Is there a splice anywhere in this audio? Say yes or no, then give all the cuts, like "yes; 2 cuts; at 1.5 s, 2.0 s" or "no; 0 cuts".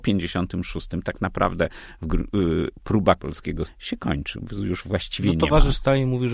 yes; 2 cuts; at 3.2 s, 3.7 s